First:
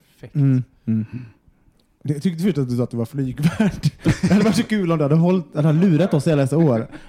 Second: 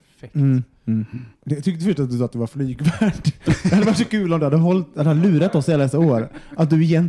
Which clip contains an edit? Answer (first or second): second